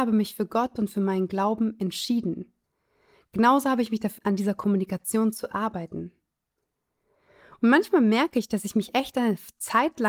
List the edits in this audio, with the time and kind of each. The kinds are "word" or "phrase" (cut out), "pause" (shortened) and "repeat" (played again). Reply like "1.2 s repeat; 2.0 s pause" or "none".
4.2 s word